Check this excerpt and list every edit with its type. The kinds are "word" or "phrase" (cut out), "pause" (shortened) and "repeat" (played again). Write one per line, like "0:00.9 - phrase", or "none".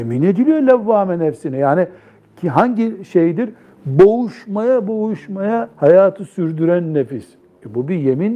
0:05.7 - pause